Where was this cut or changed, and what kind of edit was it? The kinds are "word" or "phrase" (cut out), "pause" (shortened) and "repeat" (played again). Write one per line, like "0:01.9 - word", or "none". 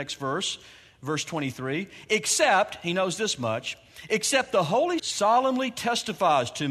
0:05.0 - word